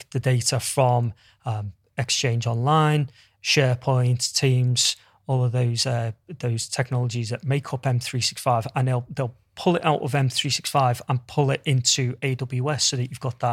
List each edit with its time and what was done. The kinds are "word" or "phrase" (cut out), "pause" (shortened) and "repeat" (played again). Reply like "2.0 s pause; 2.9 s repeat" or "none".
none